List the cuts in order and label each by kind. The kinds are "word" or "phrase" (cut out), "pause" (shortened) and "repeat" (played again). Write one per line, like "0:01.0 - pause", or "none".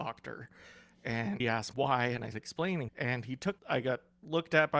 0:01.4 - word
0:01.7 - word
0:02.3 - word
0:02.9 - word
0:03.6 - word

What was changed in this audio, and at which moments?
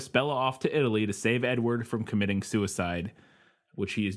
none

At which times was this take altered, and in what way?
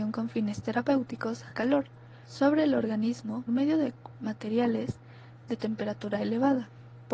0:01.5 - word
0:02.2 - pause
0:03.5 - word
0:04.1 - word

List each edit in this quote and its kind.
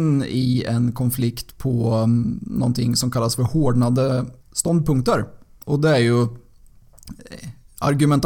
0:04.4 - pause

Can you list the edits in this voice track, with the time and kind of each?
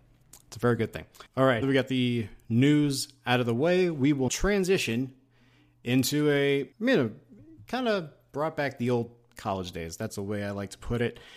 0:01.3 - pause
0:01.6 - word
0:04.3 - word
0:06.7 - pause
0:10.1 - word

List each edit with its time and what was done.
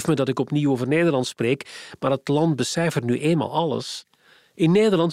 none

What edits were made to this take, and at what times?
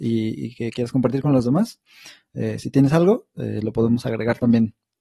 none

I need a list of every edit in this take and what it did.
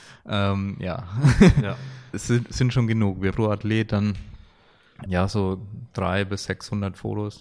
0:02.1 - word
0:03.3 - word
0:05.1 - word

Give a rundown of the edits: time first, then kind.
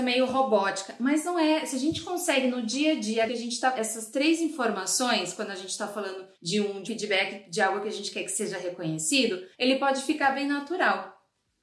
0:03.3 - word
0:03.7 - word
0:06.3 - pause
0:06.9 - word
0:09.5 - pause

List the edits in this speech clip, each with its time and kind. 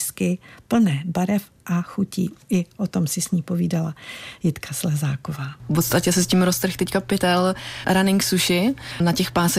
none

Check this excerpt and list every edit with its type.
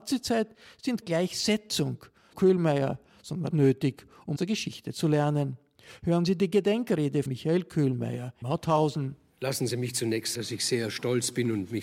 0:01.0 - word
0:02.3 - word
0:03.5 - word
0:04.4 - word
0:07.3 - word
0:08.4 - word
0:10.3 - word

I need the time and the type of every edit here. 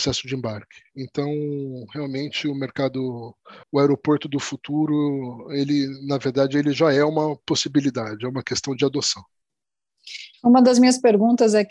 0:03.6 - pause

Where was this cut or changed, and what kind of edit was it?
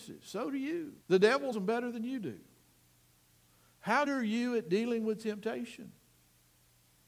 0:01.0 - pause
0:01.5 - word
0:04.1 - word

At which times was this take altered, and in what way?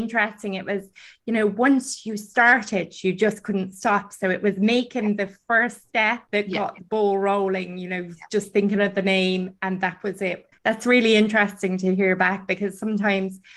0:06.3 - pause
0:10.6 - pause

